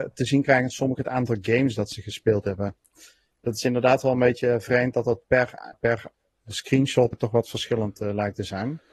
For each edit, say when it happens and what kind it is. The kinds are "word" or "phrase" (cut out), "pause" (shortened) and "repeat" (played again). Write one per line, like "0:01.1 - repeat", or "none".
0:05.7 - word
0:07.1 - word